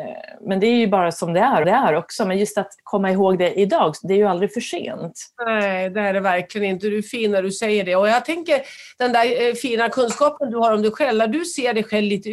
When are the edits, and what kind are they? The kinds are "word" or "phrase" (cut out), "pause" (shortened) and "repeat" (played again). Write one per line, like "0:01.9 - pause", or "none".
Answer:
0:01.6 - repeat

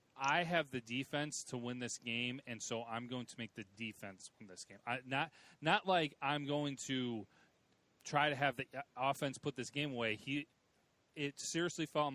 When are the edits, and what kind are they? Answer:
none

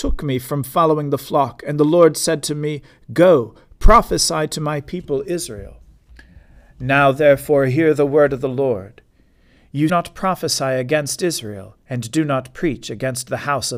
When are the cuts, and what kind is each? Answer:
0:09.9 - phrase
0:11.8 - pause

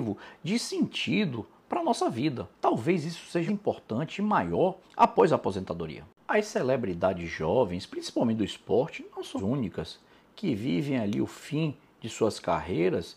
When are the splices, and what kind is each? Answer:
0:02.5 - pause
0:03.5 - word
0:04.8 - pause
0:09.4 - word

